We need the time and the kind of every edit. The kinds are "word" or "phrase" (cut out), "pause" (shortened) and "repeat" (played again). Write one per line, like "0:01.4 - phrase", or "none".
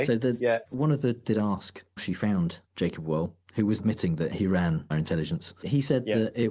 0:01.2 - word
0:02.0 - word
0:02.7 - pause
0:03.8 - word
0:04.9 - word